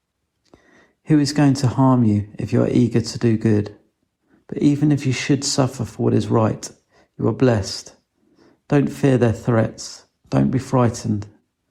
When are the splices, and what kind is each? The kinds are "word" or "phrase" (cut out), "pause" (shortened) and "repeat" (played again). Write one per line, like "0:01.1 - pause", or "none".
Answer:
none